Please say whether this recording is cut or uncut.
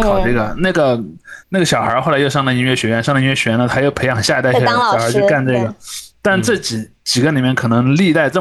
cut